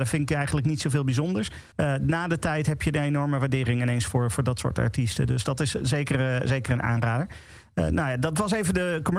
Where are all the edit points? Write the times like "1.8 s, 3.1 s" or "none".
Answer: 1.7 s